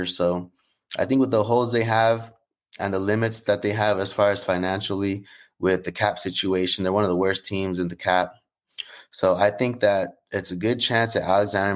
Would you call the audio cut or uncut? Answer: uncut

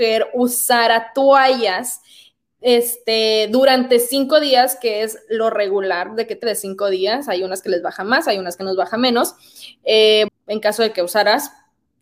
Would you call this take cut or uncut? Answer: cut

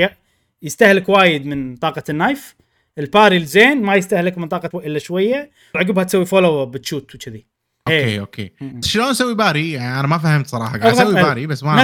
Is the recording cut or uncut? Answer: cut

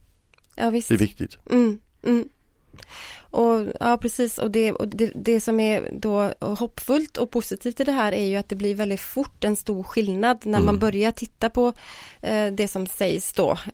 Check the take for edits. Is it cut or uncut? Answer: cut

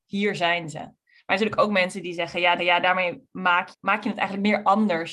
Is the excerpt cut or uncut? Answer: cut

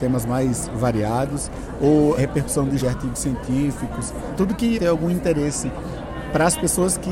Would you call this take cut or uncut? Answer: cut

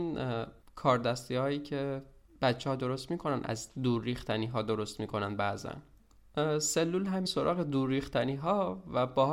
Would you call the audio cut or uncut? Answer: cut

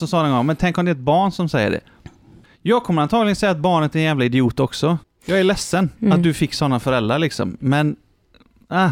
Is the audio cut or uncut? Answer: cut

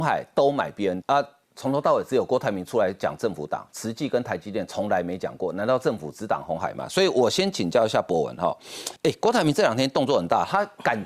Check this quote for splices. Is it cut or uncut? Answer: cut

